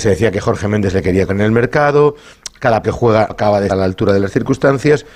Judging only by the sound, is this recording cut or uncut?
cut